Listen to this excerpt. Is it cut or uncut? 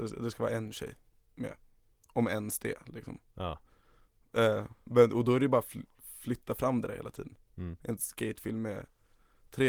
uncut